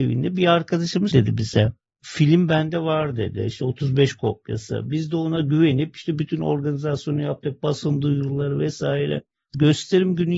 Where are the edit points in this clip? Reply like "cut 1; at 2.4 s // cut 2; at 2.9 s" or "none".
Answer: cut 1; at 1.1 s